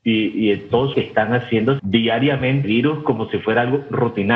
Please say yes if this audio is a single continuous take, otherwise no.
no